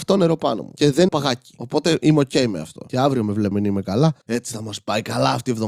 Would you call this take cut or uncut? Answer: cut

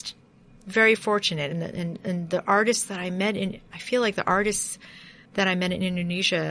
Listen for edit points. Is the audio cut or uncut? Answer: cut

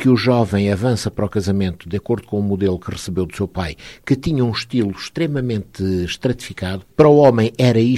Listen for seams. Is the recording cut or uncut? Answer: cut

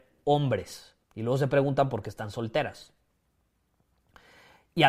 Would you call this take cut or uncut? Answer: cut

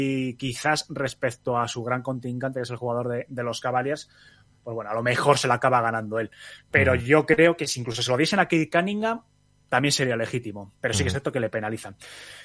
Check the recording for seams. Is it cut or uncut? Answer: uncut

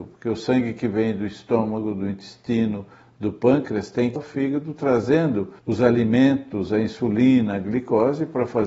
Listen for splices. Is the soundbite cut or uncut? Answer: cut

